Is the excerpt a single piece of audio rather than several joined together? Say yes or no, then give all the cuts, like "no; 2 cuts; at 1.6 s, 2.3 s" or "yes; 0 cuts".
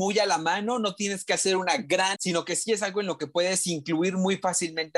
no; 1 cut; at 2.1 s